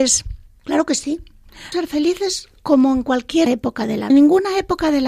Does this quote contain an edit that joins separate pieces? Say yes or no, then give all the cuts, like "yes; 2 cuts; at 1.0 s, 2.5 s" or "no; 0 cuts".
yes; 3 cuts; at 1.7 s, 3.5 s, 4.1 s